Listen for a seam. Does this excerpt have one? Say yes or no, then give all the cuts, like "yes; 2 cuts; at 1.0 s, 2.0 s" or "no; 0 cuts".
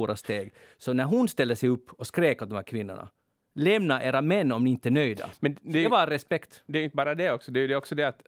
no; 0 cuts